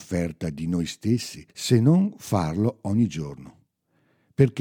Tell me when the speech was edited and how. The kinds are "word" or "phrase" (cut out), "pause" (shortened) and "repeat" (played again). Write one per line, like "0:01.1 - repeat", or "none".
0:01.5 - pause